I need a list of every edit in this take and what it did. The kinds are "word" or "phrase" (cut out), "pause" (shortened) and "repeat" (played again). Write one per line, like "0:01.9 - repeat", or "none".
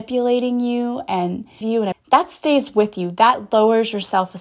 0:01.6 - phrase
0:01.9 - phrase